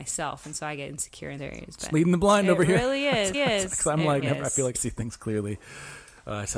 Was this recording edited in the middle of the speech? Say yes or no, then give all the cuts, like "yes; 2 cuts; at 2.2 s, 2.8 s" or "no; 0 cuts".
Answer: yes; 5 cuts; at 1.4 s, 1.9 s, 3.3 s, 4.2 s, 4.7 s